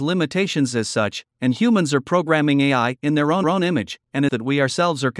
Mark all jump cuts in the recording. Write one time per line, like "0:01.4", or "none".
0:03.4
0:04.3